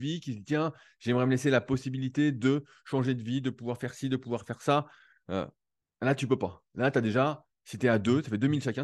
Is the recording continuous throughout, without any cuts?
yes; 0 cuts

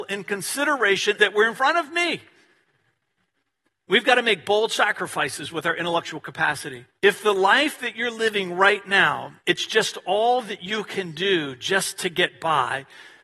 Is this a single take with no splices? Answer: no; 3 cuts; at 1.2 s, 6.9 s, 9.4 s

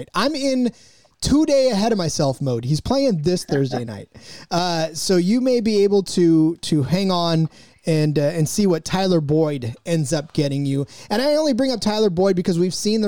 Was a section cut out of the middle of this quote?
no; 0 cuts

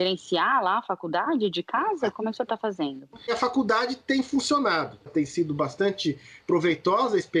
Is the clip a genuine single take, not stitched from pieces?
yes; 0 cuts

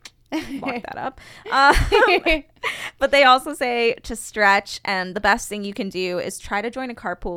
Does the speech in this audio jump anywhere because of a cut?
no; 0 cuts

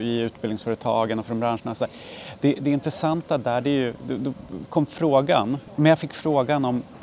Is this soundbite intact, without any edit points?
yes; 0 cuts

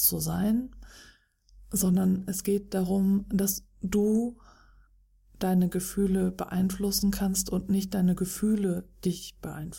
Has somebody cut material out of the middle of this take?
no; 0 cuts

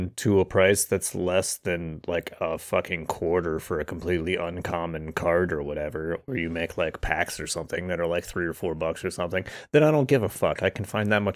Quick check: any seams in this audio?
no; 0 cuts

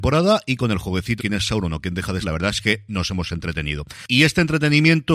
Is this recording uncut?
no; 2 cuts; at 1.2 s, 2.2 s

